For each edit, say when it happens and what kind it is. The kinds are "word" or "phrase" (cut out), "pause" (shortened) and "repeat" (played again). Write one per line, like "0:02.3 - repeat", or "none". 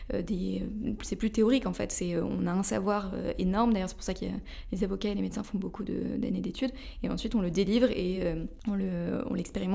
none

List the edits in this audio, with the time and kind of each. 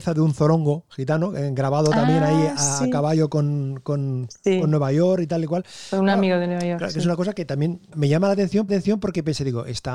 0:08.7 - repeat

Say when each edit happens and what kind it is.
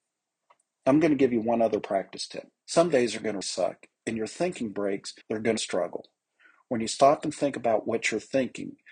0:02.6 - pause
0:03.4 - word
0:05.2 - pause
0:05.6 - phrase

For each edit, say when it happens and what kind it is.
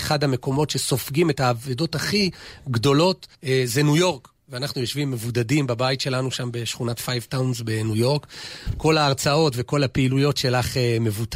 0:03.3 - pause

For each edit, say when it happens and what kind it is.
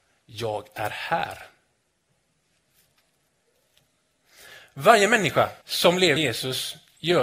0:05.6 - pause
0:06.2 - word

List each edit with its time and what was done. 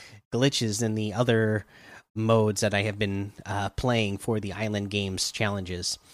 none

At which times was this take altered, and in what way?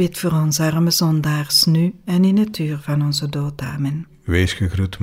none

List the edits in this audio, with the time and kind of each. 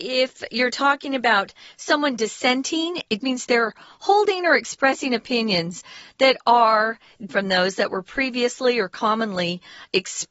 0:03.2 - word
0:07.3 - word

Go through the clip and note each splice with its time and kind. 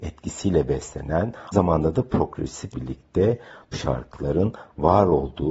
0:01.5 - word
0:02.7 - word
0:03.7 - word

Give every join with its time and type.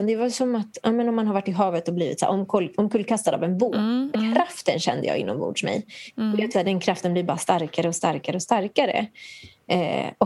0:04.1 - word
0:06.5 - word

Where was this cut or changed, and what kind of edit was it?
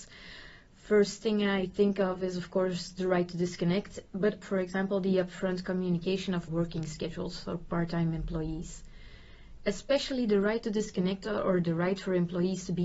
0:04.4 - word
0:06.5 - word

